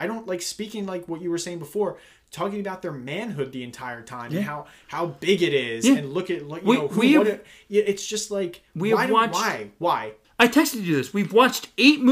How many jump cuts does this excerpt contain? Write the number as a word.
zero